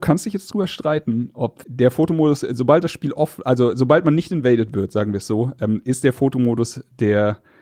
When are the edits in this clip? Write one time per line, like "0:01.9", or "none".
0:01.6